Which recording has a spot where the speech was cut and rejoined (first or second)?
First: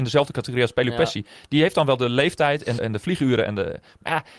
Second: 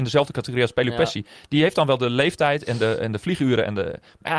first